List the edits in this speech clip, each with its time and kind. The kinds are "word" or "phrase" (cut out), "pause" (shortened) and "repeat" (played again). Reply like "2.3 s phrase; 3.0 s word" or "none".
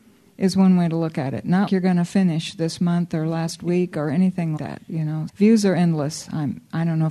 1.7 s word; 4.6 s word; 5.3 s word